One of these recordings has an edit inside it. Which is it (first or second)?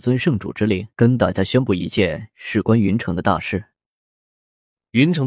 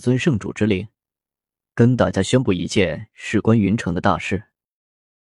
first